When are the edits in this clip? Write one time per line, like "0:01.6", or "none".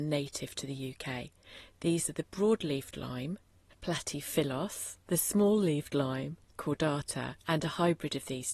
0:03.7
0:05.0
0:06.5
0:07.4